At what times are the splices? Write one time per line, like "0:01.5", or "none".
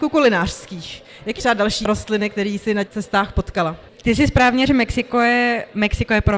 0:01.4
0:02.8
0:04.7